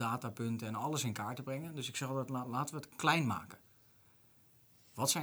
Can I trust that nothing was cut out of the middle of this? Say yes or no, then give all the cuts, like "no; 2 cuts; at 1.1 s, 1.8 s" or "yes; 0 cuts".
yes; 0 cuts